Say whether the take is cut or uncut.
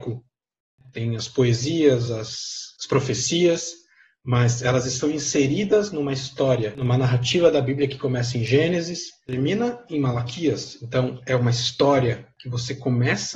uncut